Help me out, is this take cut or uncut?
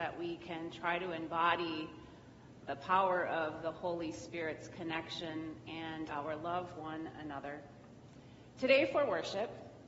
cut